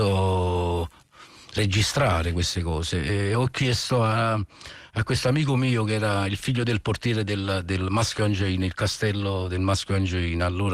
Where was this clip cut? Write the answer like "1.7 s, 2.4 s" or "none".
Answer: none